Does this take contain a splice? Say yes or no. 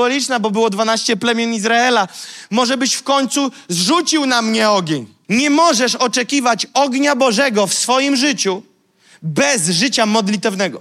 no